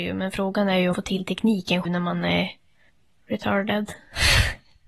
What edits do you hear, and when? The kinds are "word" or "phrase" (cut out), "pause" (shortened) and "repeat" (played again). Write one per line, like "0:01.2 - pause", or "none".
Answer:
0:00.9 - word
0:01.9 - word
0:02.9 - pause